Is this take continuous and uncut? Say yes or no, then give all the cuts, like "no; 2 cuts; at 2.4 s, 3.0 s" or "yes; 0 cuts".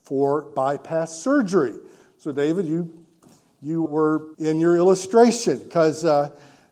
no; 2 cuts; at 3.9 s, 4.3 s